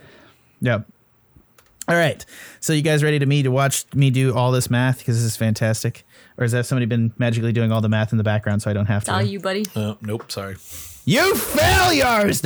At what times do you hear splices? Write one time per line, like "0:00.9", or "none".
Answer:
none